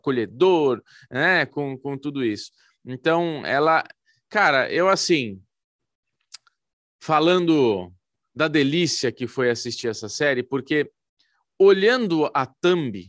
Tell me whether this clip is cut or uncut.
uncut